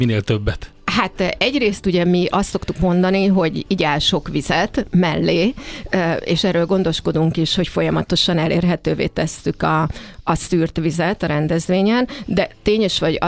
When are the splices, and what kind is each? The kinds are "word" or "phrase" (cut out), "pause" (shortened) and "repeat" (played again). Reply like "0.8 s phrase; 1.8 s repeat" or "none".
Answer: none